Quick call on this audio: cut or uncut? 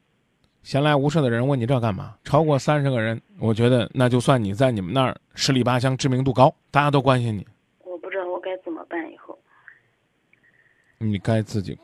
cut